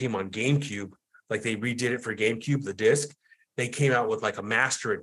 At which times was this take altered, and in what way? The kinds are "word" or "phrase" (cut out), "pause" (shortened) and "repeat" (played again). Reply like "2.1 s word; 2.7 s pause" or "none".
none